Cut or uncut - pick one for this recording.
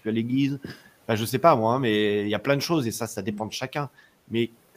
uncut